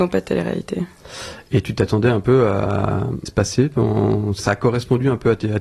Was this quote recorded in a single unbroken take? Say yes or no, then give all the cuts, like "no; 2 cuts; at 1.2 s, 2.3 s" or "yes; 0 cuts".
no; 2 cuts; at 3.3 s, 4.4 s